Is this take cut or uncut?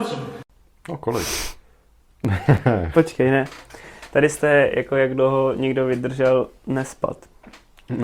uncut